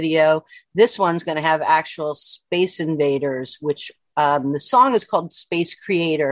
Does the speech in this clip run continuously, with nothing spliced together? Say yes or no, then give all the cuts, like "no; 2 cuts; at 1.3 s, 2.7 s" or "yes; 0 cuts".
yes; 0 cuts